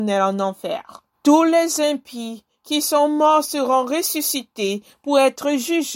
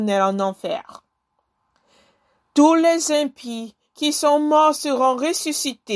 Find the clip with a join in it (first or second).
first